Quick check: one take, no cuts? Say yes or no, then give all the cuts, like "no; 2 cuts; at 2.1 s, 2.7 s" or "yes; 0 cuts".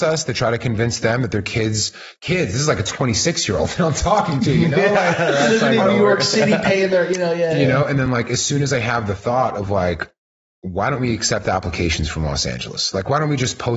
yes; 0 cuts